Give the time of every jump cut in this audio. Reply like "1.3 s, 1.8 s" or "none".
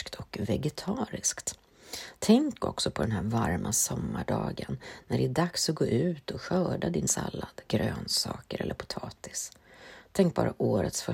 7.1 s